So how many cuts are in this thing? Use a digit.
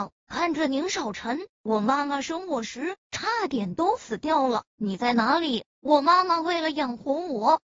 0